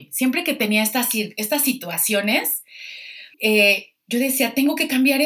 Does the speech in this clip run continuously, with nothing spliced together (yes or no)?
no